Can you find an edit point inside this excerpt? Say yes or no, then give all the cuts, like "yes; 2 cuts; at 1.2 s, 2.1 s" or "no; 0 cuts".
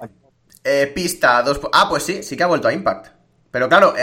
no; 0 cuts